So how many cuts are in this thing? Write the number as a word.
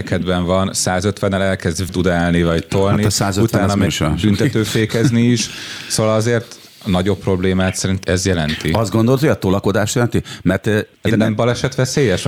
four